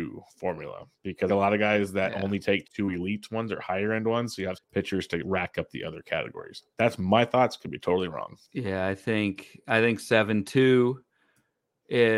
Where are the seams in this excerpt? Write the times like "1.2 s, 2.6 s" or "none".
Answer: 1.3 s, 2.6 s, 4.5 s, 8.4 s